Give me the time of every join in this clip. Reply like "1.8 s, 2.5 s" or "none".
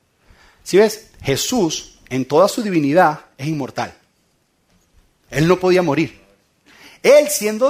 none